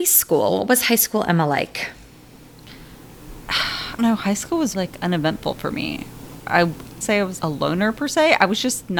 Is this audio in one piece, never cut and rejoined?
no; 4 cuts; at 4.0 s, 4.7 s, 7.0 s, 7.4 s

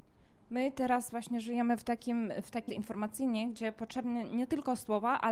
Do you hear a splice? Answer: yes; 1 cut; at 2.7 s

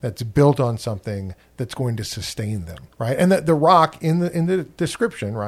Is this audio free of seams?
no; 1 cut; at 2.9 s

